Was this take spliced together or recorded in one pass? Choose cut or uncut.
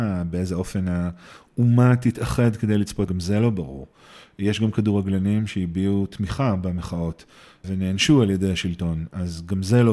cut